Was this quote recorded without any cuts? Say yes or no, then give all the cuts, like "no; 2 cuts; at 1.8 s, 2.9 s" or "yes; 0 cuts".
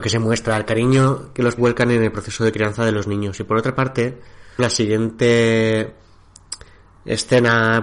no; 2 cuts; at 1.6 s, 4.6 s